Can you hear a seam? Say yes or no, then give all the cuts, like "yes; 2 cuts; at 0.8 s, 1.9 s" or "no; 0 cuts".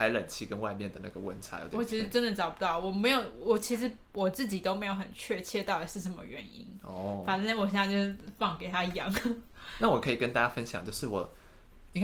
no; 0 cuts